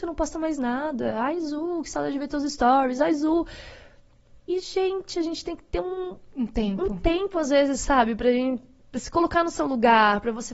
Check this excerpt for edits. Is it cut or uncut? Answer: cut